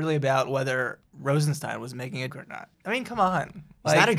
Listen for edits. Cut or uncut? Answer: cut